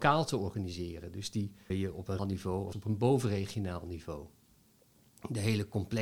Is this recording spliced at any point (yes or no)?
yes